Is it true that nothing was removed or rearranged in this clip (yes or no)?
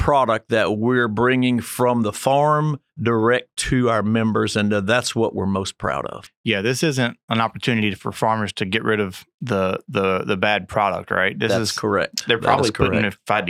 no